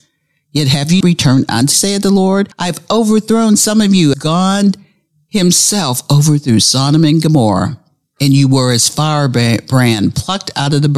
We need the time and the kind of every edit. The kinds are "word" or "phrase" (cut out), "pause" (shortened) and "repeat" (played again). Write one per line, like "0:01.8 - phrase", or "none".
0:01.0 - word
0:01.7 - word
0:02.5 - pause
0:04.1 - word